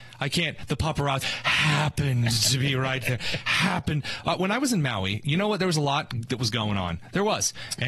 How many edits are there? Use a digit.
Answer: 1